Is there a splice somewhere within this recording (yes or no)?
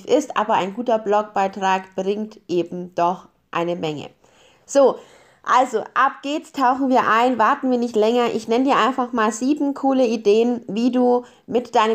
no